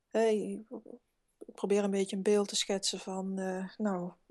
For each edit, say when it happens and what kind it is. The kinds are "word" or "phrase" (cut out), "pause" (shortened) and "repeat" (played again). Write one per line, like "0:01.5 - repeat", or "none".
none